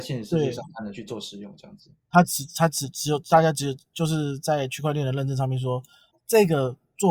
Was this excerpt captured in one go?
no; 1 cut; at 6.1 s

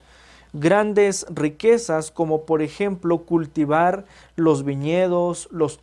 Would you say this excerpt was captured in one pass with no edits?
yes; 0 cuts

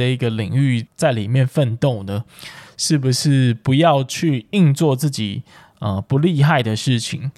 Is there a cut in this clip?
no; 0 cuts

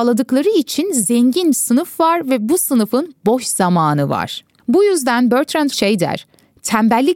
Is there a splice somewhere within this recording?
yes; 2 cuts; at 1.5 s, 5.7 s

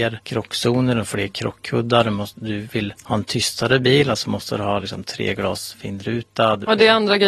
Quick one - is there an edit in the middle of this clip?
no; 0 cuts

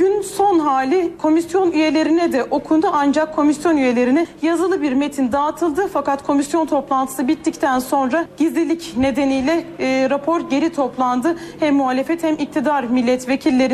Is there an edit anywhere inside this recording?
no; 0 cuts

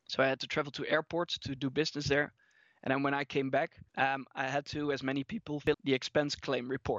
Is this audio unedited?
no; 2 cuts; at 3.9 s, 5.7 s

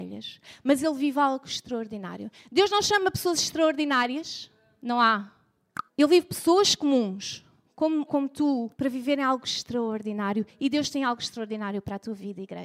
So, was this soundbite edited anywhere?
yes; 3 cuts; at 5.9 s, 8.1 s, 8.7 s

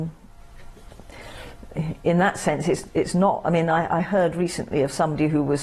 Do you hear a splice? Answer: no; 0 cuts

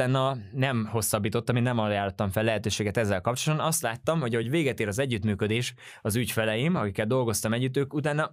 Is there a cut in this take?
no; 0 cuts

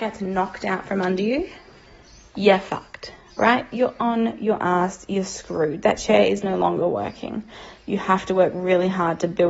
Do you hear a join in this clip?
no; 0 cuts

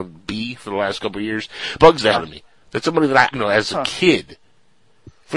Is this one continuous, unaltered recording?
no; 4 cuts; at 1.8 s, 2.1 s, 2.5 s, 3.3 s

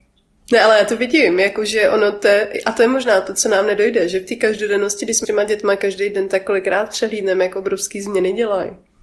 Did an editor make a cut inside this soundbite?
yes; 1 cut; at 5.2 s

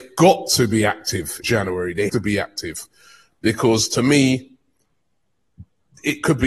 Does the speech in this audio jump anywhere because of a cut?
yes; 2 cuts; at 1.4 s, 2.1 s

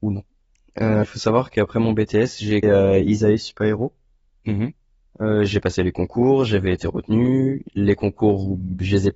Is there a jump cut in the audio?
yes; 2 cuts; at 1.0 s, 2.6 s

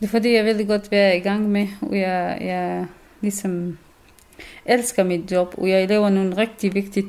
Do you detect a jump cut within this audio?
no; 0 cuts

